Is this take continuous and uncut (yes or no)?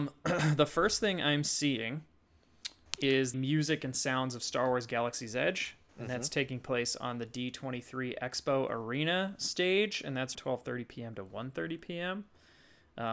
no